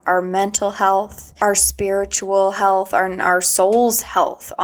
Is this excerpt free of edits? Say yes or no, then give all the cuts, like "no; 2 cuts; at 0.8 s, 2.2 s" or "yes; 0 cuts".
yes; 0 cuts